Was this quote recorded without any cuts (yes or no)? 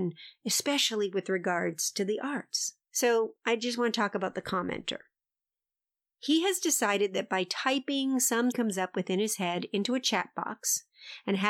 no